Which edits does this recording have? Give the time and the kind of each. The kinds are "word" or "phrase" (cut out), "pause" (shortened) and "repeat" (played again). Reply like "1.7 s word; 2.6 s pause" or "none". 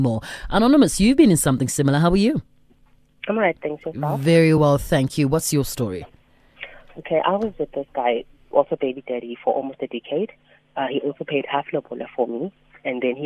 none